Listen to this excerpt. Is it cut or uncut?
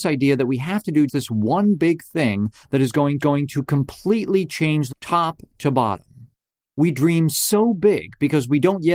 cut